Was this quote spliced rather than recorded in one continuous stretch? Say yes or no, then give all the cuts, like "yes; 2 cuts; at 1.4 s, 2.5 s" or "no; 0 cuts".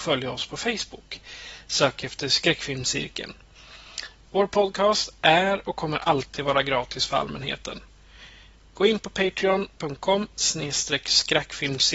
no; 0 cuts